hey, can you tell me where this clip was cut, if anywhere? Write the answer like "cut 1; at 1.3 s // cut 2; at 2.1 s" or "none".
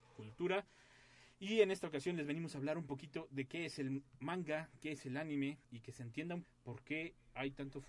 cut 1; at 4.1 s // cut 2; at 5.6 s // cut 3; at 6.4 s